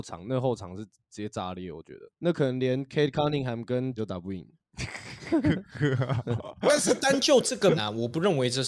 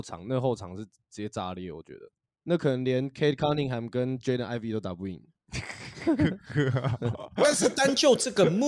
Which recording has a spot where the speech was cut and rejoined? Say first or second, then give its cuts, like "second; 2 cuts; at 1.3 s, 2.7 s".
first; 3 cuts; at 2.1 s, 4.0 s, 7.8 s